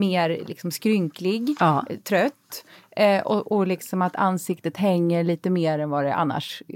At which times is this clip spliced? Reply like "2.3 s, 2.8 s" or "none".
none